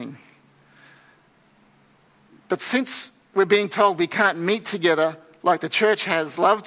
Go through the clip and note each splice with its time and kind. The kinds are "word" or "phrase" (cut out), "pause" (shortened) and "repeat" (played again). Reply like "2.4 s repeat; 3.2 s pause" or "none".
none